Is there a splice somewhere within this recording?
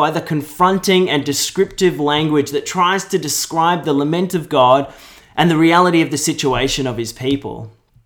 no; 0 cuts

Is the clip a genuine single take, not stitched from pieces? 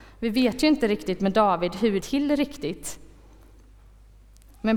no; 1 cut; at 2.0 s

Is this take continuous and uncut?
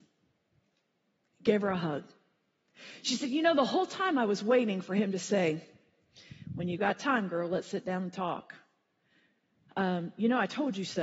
yes; 0 cuts

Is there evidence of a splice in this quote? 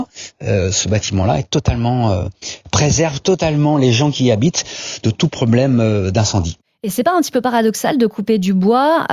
no; 0 cuts

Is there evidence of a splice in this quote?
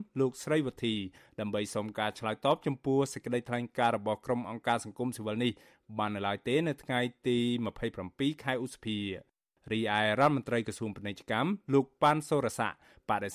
no; 0 cuts

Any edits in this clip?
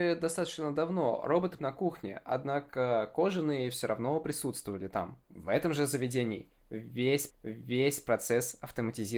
yes; 3 cuts; at 1.6 s, 5.2 s, 7.3 s

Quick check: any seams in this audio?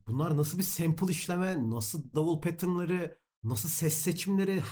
yes; 1 cut; at 2.1 s

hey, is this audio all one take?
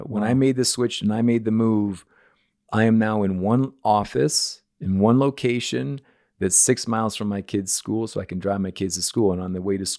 yes; 0 cuts

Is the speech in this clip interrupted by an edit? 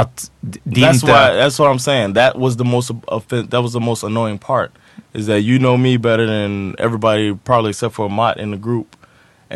no; 0 cuts

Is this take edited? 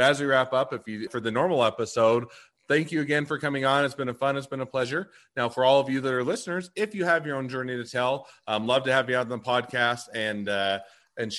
yes; 1 cut; at 1.1 s

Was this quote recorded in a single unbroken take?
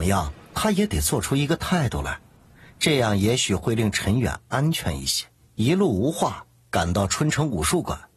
no; 1 cut; at 5.4 s

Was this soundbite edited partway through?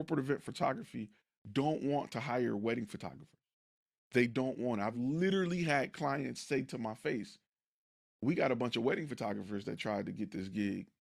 no; 0 cuts

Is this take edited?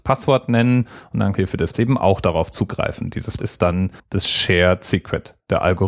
yes; 4 cuts; at 1.3 s, 1.7 s, 3.4 s, 4.0 s

